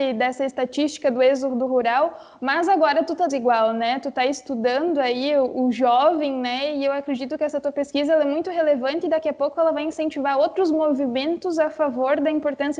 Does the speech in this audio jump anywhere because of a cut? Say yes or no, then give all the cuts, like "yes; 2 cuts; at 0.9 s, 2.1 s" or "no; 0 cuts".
yes; 1 cut; at 3.3 s